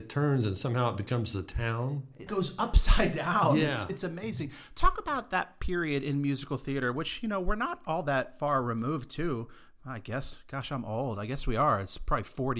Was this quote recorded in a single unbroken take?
no; 1 cut; at 2.3 s

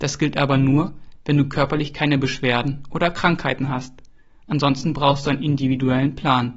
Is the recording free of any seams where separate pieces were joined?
yes; 0 cuts

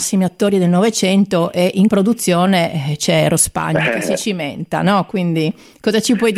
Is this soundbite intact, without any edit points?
no; 1 cut; at 1.9 s

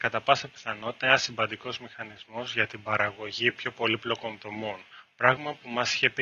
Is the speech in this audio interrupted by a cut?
no; 0 cuts

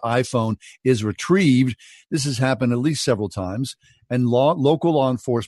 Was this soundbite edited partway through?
no; 0 cuts

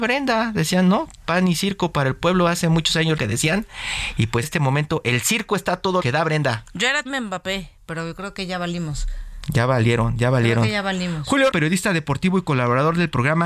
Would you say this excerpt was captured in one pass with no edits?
no; 5 cuts; at 3.2 s, 4.4 s, 6.0 s, 7.1 s, 11.5 s

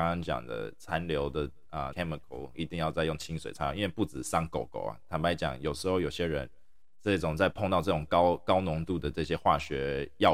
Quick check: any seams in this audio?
yes; 2 cuts; at 1.9 s, 2.5 s

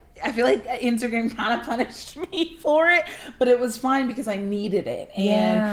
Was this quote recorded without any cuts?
yes; 0 cuts

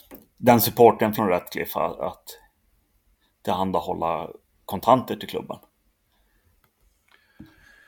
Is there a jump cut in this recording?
yes; 2 cuts; at 1.2 s, 4.5 s

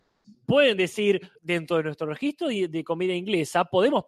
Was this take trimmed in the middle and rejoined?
yes; 1 cut; at 1.4 s

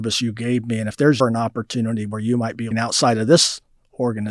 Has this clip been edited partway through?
yes; 2 cuts; at 1.2 s, 2.7 s

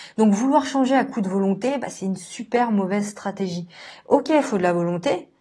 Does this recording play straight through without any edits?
yes; 0 cuts

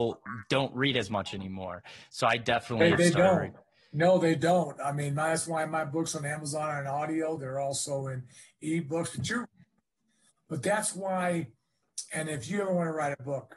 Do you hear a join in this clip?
no; 0 cuts

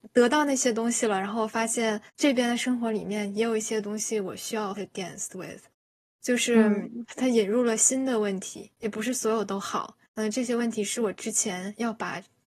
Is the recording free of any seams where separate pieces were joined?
no; 4 cuts; at 2.1 s, 4.7 s, 8.7 s, 10.0 s

